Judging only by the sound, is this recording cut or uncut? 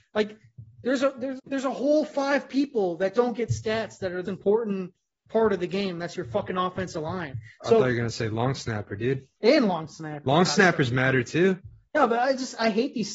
cut